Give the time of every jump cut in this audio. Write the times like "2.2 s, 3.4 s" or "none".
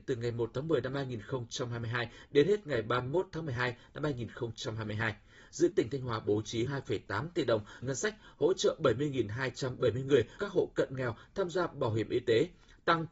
5.7 s, 6.7 s, 7.8 s, 10.4 s